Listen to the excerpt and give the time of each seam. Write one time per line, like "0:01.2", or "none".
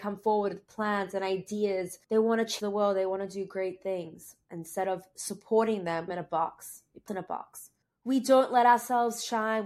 0:02.0
0:02.6
0:06.1
0:07.1
0:07.8